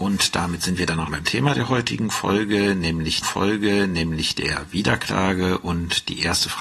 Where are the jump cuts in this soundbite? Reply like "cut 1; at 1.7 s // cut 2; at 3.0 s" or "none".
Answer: cut 1; at 1.1 s // cut 2; at 3.2 s

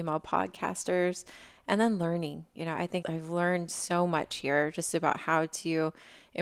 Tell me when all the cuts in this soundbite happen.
cut 1; at 3.0 s

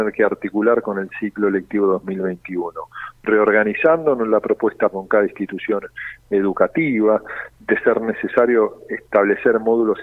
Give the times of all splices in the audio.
cut 1; at 4.9 s // cut 2; at 7.5 s

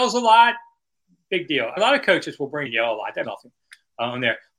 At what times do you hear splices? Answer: cut 1; at 1.8 s // cut 2; at 2.7 s // cut 3; at 3.2 s

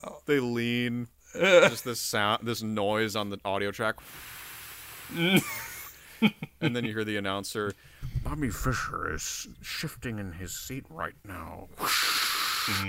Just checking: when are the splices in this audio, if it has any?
cut 1; at 1.2 s

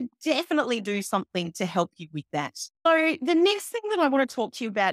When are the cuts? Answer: cut 1; at 2.7 s

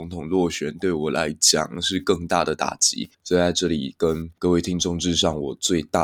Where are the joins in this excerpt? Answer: cut 1; at 3.1 s // cut 2; at 4.4 s

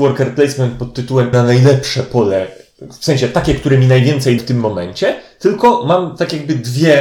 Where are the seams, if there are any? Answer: cut 1; at 1.3 s // cut 2; at 4.4 s

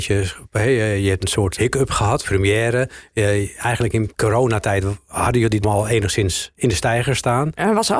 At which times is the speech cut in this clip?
cut 1; at 1.2 s // cut 2; at 1.6 s // cut 3; at 2.2 s // cut 4; at 5.6 s // cut 5; at 6.5 s

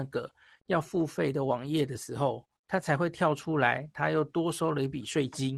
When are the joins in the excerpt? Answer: cut 1; at 2.6 s

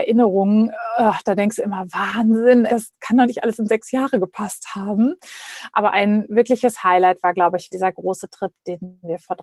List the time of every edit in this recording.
cut 1; at 2.7 s // cut 2; at 7.7 s

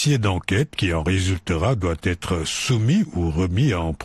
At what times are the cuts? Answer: none

